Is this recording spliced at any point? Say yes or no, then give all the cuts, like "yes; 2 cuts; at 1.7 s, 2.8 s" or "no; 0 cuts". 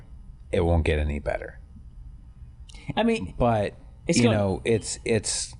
no; 0 cuts